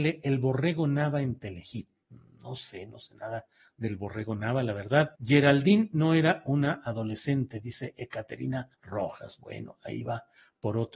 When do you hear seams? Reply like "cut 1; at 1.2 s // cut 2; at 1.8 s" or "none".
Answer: cut 1; at 5.2 s // cut 2; at 8.7 s